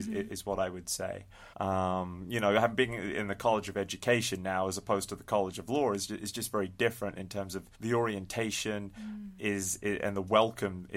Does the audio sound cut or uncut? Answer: cut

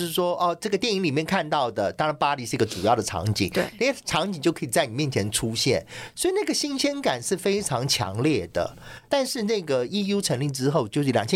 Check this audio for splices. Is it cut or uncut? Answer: uncut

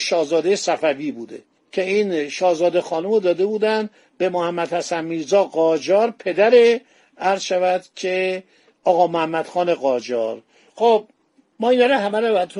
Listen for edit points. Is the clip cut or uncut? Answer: uncut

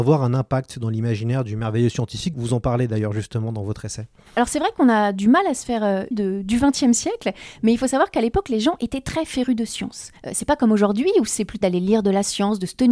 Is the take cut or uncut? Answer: cut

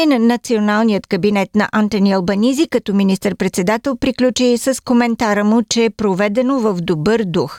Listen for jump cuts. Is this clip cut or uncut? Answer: uncut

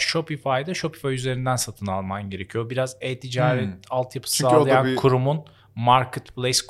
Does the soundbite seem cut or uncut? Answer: uncut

